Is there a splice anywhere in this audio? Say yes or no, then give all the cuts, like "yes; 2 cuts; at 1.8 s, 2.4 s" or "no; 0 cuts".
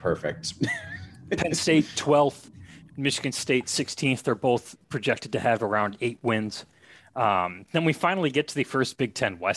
no; 0 cuts